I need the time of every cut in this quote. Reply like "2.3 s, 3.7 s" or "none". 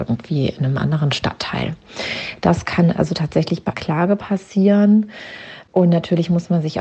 3.7 s